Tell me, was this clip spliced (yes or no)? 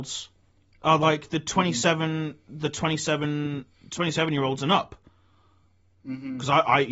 no